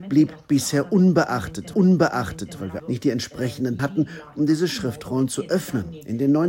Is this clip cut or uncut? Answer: cut